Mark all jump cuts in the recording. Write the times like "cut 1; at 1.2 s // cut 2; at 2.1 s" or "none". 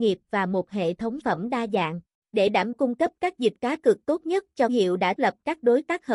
cut 1; at 1.2 s // cut 2; at 2.2 s // cut 3; at 2.7 s // cut 4; at 3.6 s // cut 5; at 4.7 s // cut 6; at 5.2 s